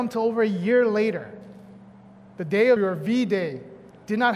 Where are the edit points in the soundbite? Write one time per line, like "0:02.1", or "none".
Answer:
0:02.8

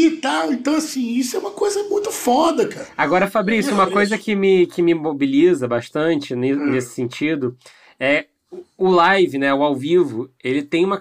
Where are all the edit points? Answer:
none

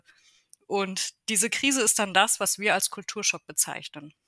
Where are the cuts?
none

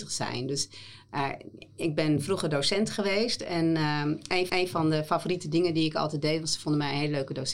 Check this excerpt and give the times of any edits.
0:01.1
0:04.5

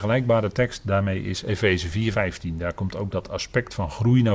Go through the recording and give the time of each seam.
0:02.1

